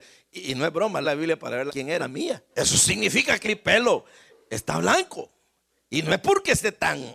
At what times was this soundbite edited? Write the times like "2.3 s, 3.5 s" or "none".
1.0 s, 1.7 s, 2.0 s, 2.5 s, 3.4 s

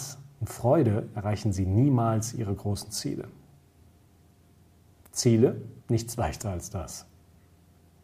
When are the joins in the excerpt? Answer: 5.8 s

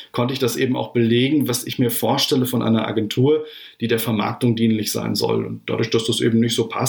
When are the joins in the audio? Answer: none

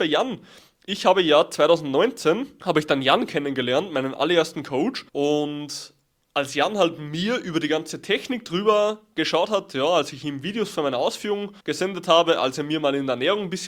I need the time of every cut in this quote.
5.1 s, 11.6 s

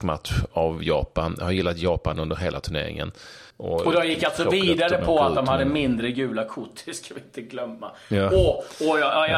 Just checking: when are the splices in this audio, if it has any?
3.5 s

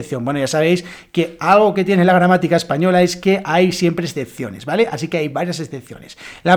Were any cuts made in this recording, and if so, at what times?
none

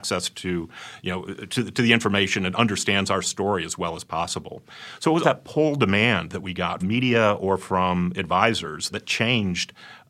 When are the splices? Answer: 5.2 s, 6.8 s, 8.9 s

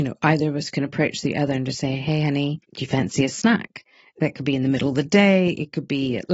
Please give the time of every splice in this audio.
2.6 s, 3.3 s

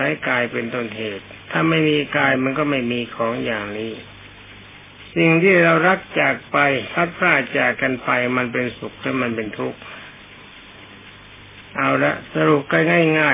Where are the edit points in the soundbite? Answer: 1.4 s

